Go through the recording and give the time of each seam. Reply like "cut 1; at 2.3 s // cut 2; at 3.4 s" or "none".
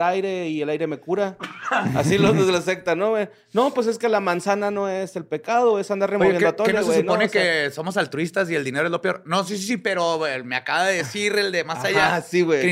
none